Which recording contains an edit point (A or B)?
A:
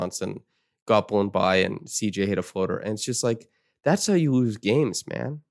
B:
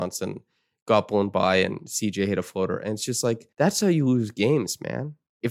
B